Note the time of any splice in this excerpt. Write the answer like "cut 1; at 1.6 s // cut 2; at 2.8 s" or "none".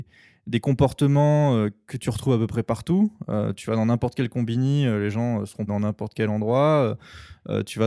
cut 1; at 5.7 s